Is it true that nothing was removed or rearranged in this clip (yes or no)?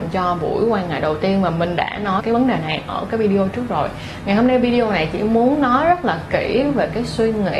no